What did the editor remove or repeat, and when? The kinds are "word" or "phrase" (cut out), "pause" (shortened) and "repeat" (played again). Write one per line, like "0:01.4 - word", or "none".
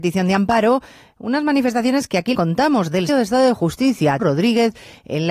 0:02.3 - word
0:03.1 - word
0:04.2 - word